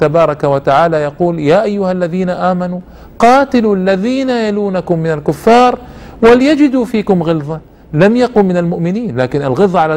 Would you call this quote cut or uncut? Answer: uncut